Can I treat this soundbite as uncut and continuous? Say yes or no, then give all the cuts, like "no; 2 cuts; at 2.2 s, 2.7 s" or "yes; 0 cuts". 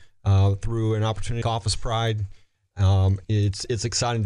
no; 2 cuts; at 1.4 s, 3.2 s